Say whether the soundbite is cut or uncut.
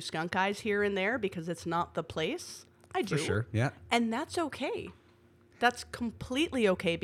uncut